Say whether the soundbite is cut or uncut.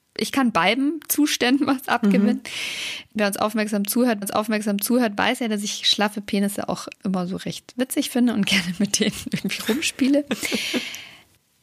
cut